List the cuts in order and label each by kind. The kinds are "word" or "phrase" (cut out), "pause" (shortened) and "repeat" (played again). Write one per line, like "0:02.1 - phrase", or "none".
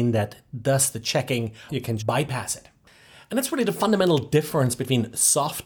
0:01.7 - word
0:02.0 - word